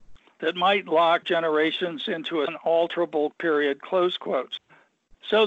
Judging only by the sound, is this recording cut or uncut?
cut